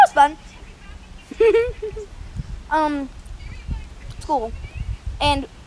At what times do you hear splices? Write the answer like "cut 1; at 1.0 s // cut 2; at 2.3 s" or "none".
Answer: cut 1; at 4.2 s